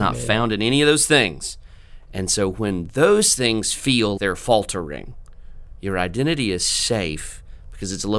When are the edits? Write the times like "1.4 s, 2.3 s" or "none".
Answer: 4.2 s